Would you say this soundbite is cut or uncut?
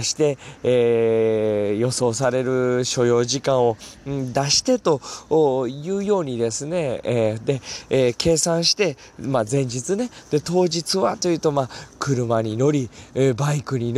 uncut